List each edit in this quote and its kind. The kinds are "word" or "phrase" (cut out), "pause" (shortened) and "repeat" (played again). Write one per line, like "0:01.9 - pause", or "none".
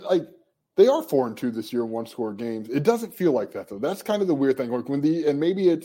none